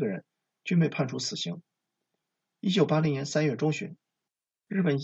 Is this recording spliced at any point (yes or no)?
no